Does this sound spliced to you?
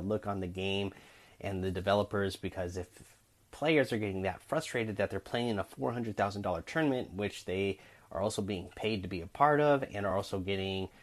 no; 0 cuts

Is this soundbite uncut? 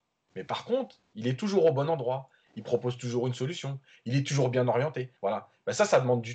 no; 1 cut; at 5.2 s

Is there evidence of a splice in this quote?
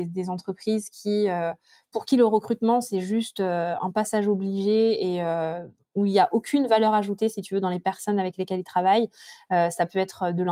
no; 0 cuts

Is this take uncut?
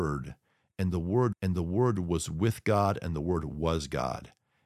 no; 1 cut; at 1.3 s

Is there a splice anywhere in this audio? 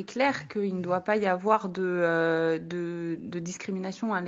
no; 0 cuts

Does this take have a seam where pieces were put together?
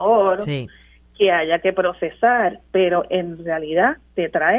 no; 0 cuts

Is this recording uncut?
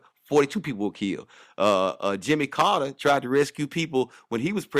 yes; 0 cuts

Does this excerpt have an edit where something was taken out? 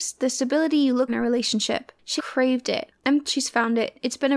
yes; 3 cuts; at 1.1 s, 2.2 s, 3.2 s

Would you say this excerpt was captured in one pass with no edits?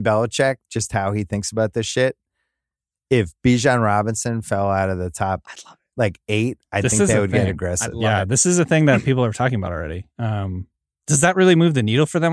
yes; 0 cuts

